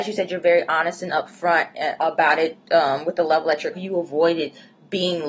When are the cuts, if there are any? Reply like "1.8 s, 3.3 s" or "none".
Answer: 3.7 s